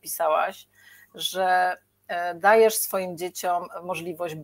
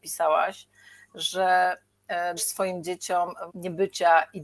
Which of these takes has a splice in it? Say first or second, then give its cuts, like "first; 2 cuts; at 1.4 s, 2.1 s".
second; 2 cuts; at 2.4 s, 3.5 s